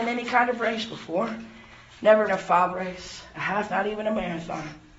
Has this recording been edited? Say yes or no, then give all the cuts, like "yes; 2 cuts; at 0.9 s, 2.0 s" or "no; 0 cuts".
yes; 3 cuts; at 2.3 s, 2.7 s, 3.7 s